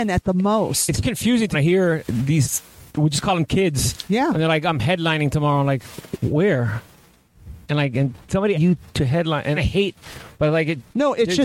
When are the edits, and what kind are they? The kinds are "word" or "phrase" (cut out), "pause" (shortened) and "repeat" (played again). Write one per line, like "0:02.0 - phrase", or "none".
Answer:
0:01.5 - phrase
0:02.9 - pause
0:07.6 - pause
0:08.5 - phrase
0:09.6 - phrase